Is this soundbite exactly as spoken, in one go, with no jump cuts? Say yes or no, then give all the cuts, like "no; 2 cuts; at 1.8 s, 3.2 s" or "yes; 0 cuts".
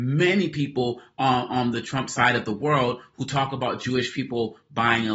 yes; 0 cuts